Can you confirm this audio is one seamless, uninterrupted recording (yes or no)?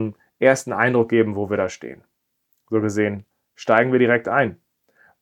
yes